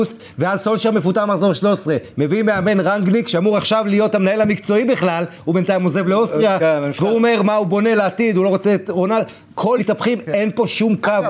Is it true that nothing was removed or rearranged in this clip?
no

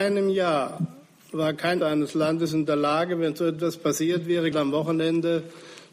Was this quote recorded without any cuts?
no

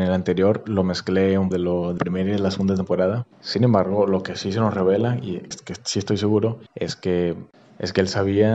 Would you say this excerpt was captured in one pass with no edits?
no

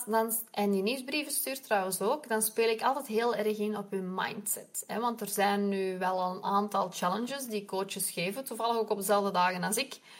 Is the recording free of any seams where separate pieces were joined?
yes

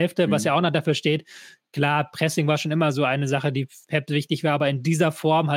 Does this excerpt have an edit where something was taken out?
no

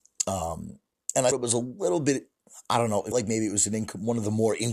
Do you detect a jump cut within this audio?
yes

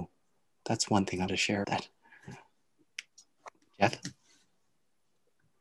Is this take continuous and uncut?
no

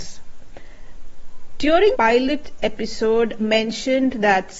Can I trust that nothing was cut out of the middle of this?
no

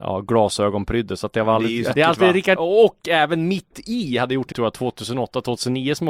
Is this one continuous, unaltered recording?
no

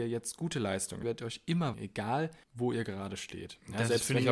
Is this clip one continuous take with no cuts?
no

